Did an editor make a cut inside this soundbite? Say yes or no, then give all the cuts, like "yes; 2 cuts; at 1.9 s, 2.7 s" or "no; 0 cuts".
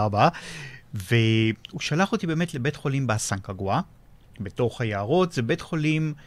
no; 0 cuts